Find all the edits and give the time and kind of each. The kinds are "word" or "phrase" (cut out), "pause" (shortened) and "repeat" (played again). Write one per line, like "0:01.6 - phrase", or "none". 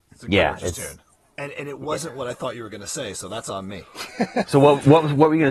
none